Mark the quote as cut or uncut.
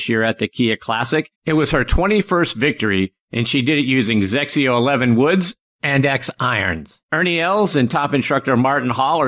cut